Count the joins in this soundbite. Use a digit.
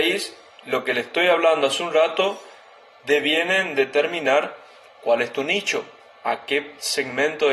1